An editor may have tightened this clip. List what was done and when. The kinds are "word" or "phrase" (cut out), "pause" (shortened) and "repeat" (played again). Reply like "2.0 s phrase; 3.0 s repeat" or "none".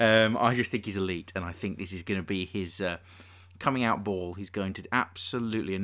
none